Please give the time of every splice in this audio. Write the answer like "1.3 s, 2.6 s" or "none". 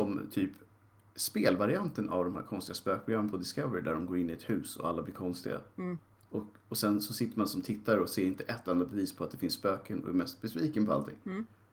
none